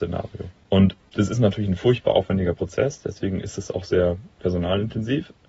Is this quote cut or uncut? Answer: uncut